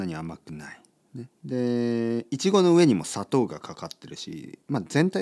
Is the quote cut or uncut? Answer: cut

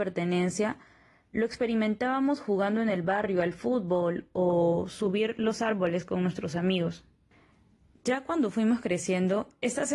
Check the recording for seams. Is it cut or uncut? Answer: uncut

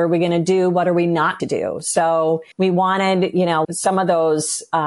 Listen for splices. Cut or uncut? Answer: cut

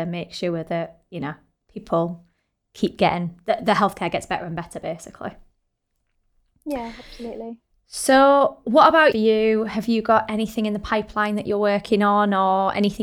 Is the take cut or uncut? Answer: cut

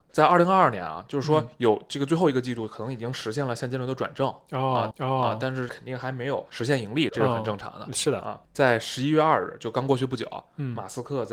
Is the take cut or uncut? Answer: cut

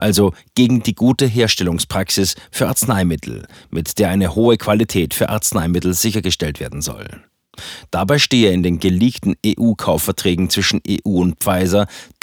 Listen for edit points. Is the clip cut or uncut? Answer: uncut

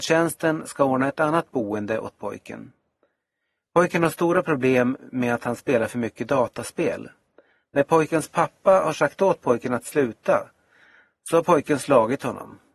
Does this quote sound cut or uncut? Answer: uncut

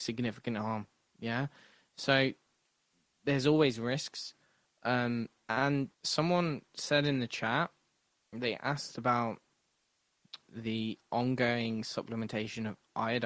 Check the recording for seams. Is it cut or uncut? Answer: cut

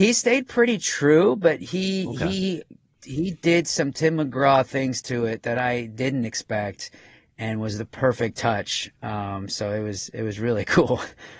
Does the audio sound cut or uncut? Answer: uncut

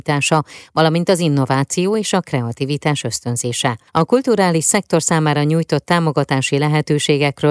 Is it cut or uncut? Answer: cut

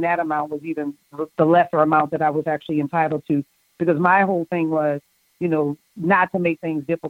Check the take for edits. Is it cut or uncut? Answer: uncut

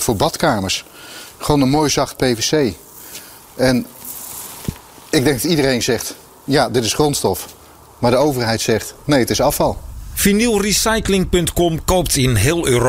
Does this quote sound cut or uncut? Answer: uncut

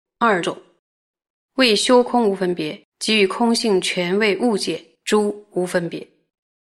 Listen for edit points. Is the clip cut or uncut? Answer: cut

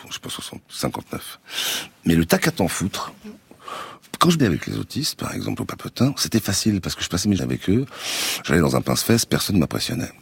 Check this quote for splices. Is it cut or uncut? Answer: cut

